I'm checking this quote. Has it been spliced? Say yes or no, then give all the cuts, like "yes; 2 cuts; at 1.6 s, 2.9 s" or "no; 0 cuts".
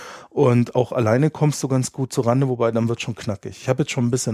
no; 0 cuts